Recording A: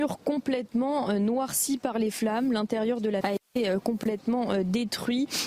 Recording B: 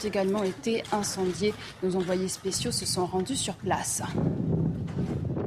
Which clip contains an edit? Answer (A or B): A